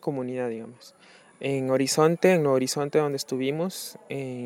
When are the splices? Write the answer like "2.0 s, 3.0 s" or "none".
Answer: none